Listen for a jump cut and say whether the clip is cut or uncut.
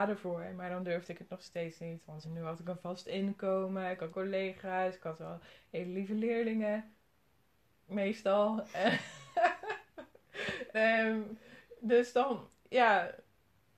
cut